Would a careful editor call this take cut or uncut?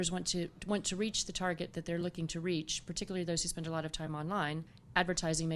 uncut